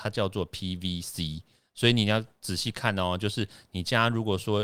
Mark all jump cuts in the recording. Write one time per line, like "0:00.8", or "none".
none